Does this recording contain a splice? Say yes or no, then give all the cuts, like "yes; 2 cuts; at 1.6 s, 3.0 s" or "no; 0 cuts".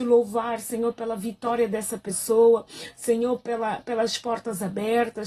no; 0 cuts